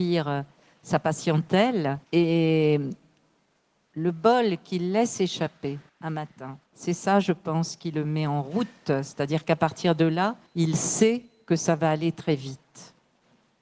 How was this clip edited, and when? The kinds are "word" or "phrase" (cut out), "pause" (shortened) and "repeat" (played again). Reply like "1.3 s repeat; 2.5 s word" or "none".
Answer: 2.0 s pause; 5.9 s pause; 6.7 s pause; 10.5 s pause